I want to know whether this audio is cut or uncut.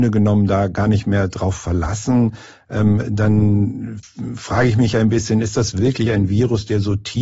uncut